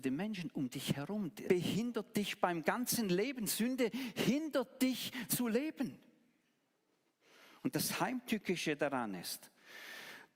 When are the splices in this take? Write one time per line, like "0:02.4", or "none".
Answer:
0:01.5
0:05.3